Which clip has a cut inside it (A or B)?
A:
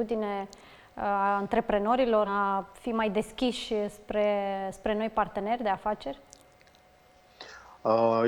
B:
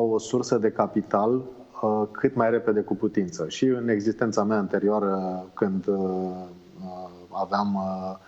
A